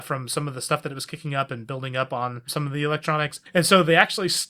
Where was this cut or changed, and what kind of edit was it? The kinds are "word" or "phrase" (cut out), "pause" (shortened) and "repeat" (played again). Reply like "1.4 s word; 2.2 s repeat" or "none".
2.5 s word